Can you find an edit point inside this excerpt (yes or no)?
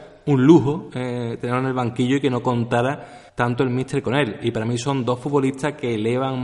yes